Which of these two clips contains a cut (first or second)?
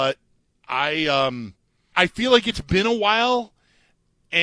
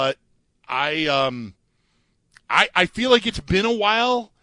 first